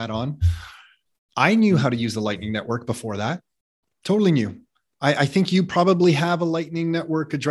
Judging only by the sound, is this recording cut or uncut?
uncut